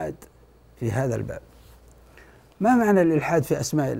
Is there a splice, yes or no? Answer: no